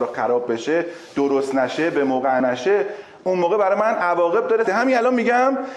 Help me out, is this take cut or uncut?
cut